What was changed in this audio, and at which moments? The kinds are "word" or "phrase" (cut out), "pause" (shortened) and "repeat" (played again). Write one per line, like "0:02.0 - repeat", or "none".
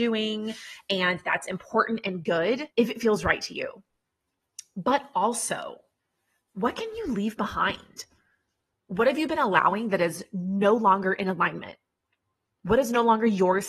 0:02.7 - pause